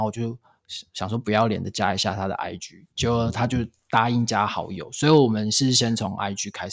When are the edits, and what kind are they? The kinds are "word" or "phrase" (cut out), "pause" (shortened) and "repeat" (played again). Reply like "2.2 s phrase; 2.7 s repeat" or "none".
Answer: none